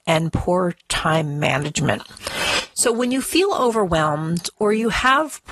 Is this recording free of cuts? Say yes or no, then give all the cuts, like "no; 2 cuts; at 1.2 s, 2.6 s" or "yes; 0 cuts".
yes; 0 cuts